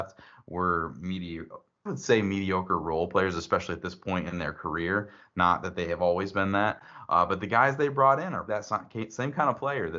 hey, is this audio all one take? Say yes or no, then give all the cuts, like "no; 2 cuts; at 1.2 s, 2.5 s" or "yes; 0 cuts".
no; 2 cuts; at 1.9 s, 8.5 s